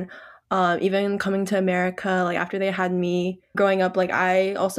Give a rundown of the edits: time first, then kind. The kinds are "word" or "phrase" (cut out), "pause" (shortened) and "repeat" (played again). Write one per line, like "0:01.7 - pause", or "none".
0:03.5 - word